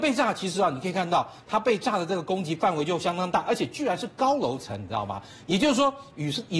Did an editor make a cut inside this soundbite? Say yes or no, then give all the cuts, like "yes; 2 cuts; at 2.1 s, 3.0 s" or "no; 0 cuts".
no; 0 cuts